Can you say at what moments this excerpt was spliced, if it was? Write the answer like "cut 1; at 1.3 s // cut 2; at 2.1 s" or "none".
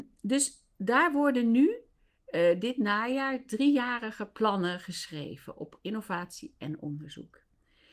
none